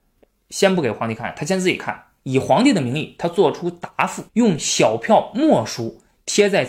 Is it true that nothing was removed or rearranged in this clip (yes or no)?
no